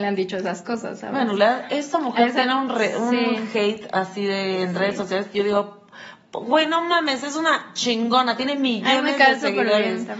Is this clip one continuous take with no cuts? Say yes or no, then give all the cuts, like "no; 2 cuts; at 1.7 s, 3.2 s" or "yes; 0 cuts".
yes; 0 cuts